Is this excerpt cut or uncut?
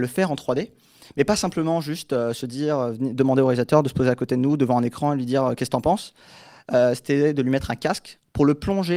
uncut